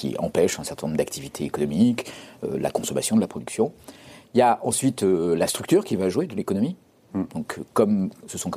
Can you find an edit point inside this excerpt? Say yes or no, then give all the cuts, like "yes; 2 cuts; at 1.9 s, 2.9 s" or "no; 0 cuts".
no; 0 cuts